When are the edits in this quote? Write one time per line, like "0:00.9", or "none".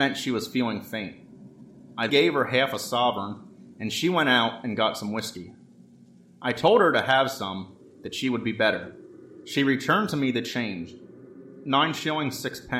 0:02.1